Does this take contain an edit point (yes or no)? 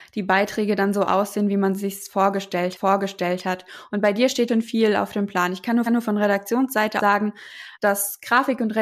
yes